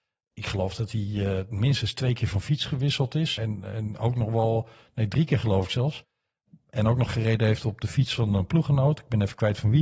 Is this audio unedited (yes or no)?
yes